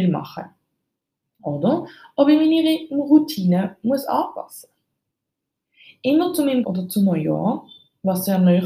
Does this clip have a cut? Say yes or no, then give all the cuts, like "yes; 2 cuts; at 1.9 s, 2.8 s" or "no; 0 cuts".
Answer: yes; 1 cut; at 6.6 s